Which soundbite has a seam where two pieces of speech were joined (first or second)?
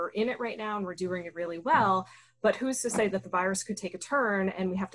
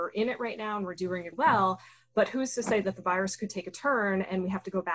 second